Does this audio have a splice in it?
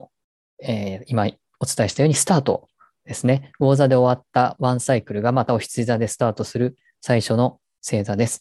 no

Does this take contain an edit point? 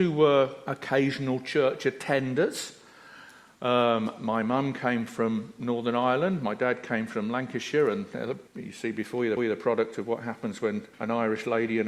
yes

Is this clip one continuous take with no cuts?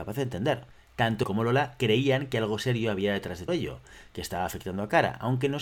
no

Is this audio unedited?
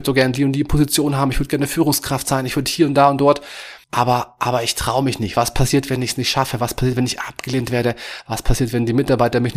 no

